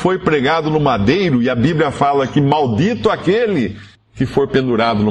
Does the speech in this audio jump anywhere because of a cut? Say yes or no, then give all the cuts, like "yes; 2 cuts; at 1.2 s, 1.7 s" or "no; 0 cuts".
no; 0 cuts